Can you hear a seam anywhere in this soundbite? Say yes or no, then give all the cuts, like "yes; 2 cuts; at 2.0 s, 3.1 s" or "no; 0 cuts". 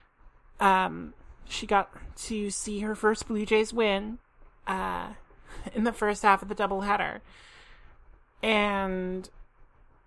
no; 0 cuts